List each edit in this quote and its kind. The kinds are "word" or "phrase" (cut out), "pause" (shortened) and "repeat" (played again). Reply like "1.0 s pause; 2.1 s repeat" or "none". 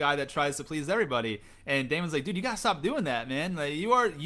none